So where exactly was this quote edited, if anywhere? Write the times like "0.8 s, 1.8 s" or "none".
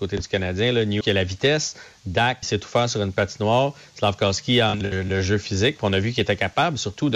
1.0 s, 2.4 s, 4.8 s